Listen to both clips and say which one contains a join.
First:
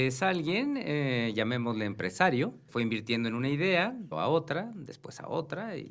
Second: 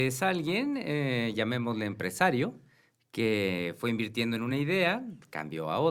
first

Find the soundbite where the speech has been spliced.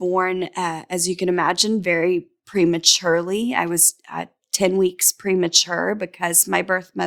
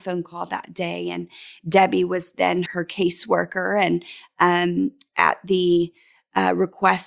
second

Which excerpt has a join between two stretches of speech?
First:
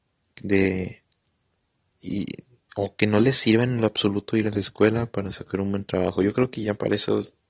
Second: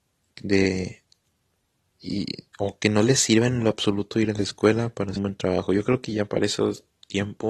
second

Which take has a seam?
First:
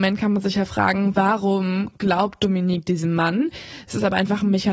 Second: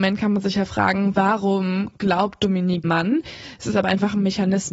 second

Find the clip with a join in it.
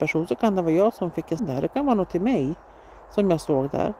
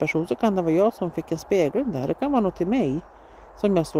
first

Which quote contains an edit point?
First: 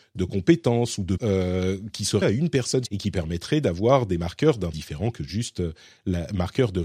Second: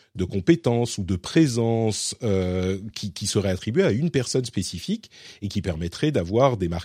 first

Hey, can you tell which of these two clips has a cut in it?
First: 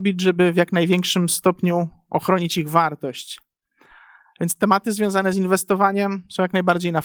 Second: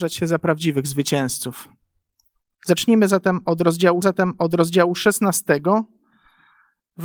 second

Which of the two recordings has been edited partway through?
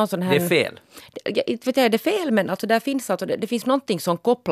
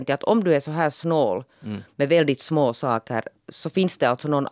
second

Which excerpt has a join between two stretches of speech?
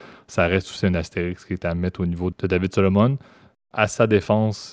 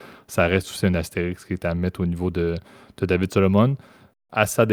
first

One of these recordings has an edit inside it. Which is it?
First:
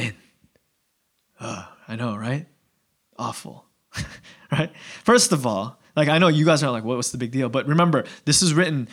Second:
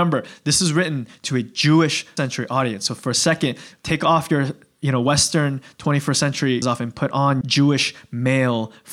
second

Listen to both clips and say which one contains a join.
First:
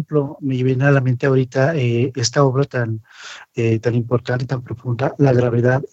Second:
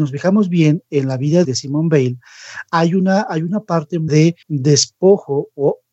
second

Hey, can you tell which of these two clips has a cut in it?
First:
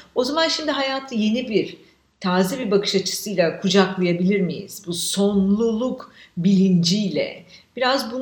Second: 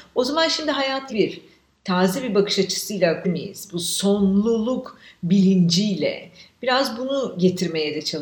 second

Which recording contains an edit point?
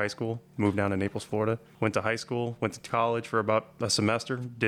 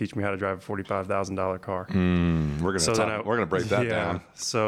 first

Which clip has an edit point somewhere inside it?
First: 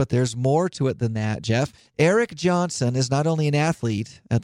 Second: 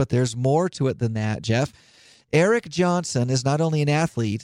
first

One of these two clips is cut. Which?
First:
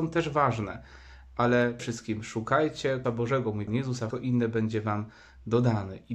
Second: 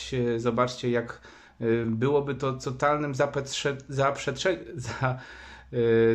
first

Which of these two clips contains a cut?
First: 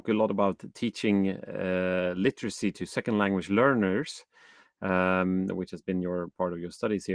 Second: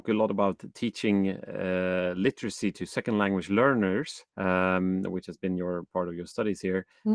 second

